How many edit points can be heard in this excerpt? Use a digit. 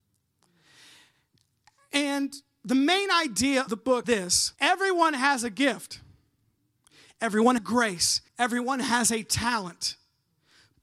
5